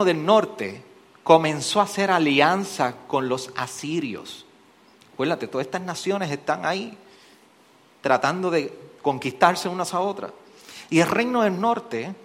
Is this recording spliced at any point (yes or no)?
no